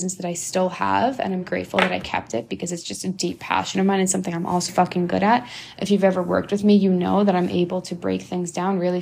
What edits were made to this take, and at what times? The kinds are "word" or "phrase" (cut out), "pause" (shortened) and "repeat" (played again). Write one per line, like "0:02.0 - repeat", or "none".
0:01.4 - word
0:04.7 - word